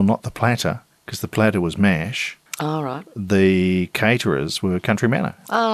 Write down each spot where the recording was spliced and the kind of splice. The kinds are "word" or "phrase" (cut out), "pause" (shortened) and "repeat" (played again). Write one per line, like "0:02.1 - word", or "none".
0:00.9 - pause
0:02.5 - pause